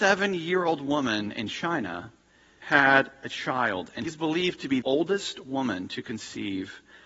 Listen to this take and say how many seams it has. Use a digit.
3